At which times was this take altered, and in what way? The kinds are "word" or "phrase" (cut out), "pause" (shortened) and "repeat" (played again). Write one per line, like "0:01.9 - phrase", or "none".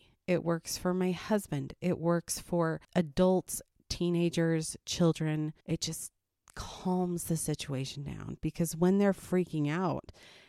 0:02.8 - pause
0:05.6 - pause